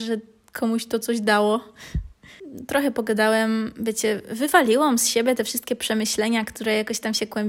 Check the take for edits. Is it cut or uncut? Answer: uncut